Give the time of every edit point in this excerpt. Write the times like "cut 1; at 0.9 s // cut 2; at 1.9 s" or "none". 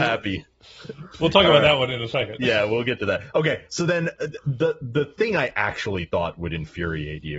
none